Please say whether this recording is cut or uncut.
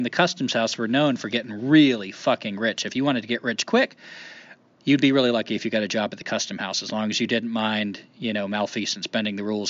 uncut